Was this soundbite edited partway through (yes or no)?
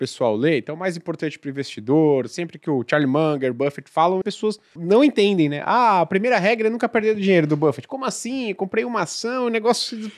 yes